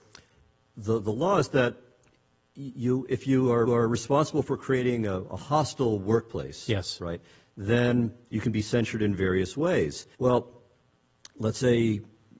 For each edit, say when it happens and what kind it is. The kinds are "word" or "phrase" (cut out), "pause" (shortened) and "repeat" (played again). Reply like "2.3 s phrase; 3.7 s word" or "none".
3.1 s word; 3.7 s repeat; 10.1 s pause